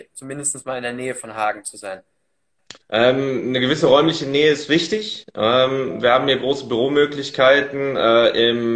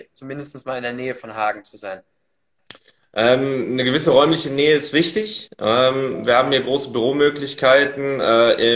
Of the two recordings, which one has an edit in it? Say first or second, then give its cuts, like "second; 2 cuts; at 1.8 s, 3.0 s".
first; 1 cut; at 2.8 s